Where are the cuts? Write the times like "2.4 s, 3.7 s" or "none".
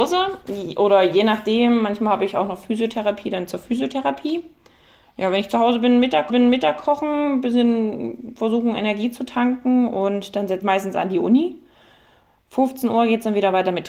6.3 s, 10.6 s